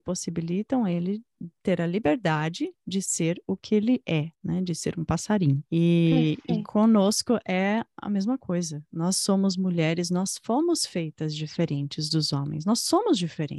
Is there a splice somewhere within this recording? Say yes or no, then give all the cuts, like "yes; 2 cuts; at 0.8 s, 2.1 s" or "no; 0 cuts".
yes; 2 cuts; at 4.3 s, 5.7 s